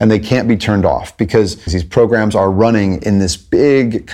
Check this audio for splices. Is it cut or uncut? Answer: cut